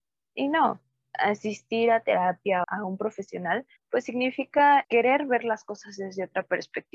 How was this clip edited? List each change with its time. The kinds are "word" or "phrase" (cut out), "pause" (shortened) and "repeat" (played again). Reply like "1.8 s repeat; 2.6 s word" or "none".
2.6 s phrase; 3.8 s pause; 4.8 s word